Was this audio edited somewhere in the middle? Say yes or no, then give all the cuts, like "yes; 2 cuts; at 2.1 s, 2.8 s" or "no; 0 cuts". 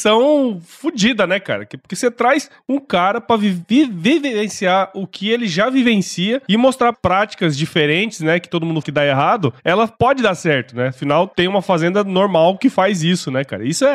yes; 2 cuts; at 6.9 s, 8.8 s